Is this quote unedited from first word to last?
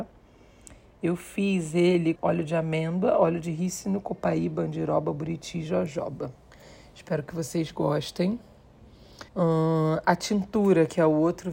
no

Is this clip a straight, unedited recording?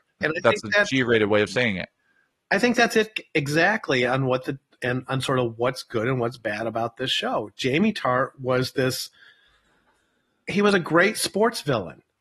yes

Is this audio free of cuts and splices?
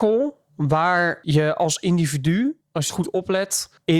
no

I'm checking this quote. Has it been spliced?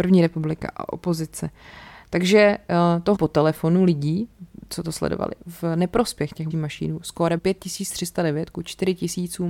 yes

